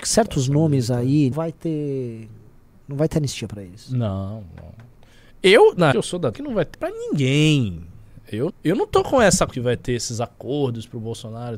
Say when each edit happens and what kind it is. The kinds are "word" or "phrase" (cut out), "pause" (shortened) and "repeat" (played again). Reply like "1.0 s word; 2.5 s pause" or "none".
1.3 s word; 5.9 s word; 6.3 s word; 6.7 s word; 8.5 s word; 9.5 s word